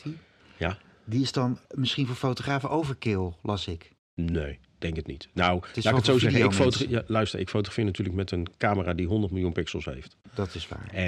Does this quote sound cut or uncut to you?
cut